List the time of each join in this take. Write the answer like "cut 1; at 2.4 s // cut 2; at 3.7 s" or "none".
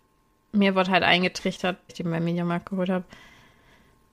cut 1; at 1.9 s

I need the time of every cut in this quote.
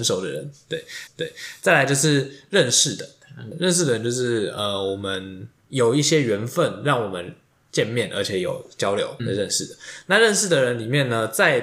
cut 1; at 1.1 s // cut 2; at 9.2 s

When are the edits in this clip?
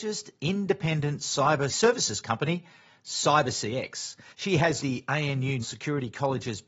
cut 1; at 1.7 s // cut 2; at 4.3 s // cut 3; at 4.8 s // cut 4; at 5.6 s

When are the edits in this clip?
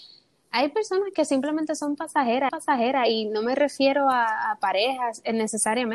cut 1; at 2.5 s

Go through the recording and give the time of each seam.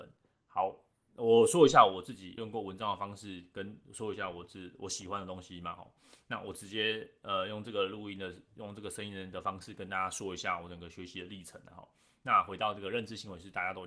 none

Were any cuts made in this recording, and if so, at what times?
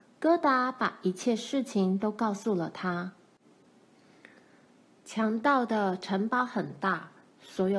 none

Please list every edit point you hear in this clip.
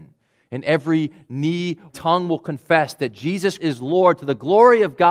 cut 1; at 1.9 s // cut 2; at 3.6 s

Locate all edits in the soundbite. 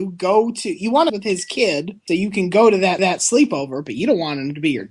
cut 1; at 1.1 s // cut 2; at 2.1 s // cut 3; at 3.0 s

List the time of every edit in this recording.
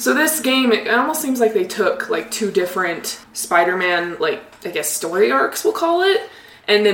cut 1; at 3.2 s

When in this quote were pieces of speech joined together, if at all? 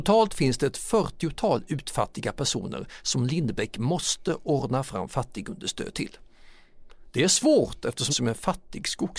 cut 1; at 8.1 s

